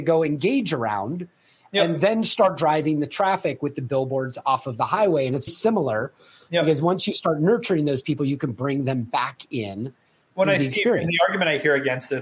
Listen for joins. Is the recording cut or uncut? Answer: cut